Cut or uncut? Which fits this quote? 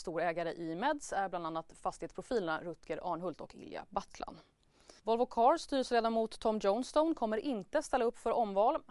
cut